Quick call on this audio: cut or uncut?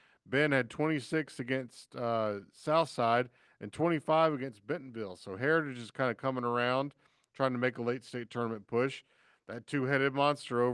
uncut